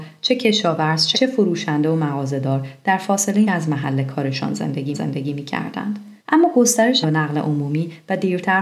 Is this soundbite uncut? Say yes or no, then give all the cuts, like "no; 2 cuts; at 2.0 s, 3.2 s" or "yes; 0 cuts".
no; 5 cuts; at 1.1 s, 3.4 s, 4.9 s, 6.2 s, 7.0 s